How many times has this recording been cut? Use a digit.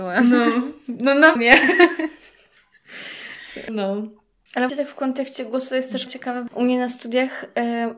5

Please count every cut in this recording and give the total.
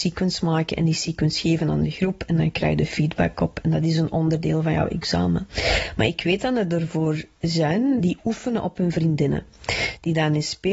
1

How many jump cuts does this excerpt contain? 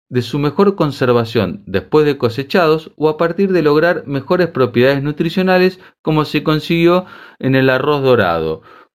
0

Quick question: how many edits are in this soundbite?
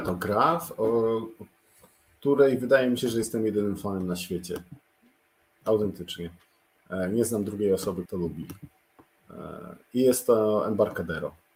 1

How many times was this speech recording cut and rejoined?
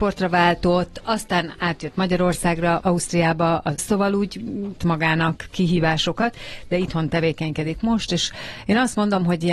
3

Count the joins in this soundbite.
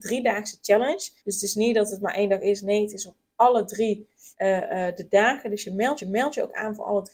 3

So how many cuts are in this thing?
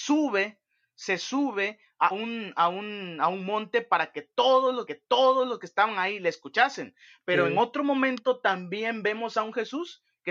2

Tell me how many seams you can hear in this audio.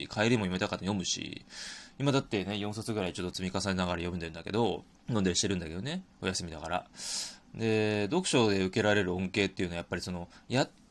1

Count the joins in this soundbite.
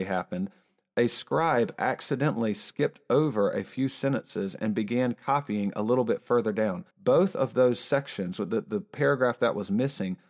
1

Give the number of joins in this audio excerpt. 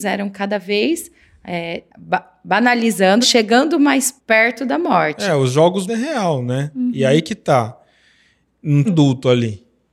5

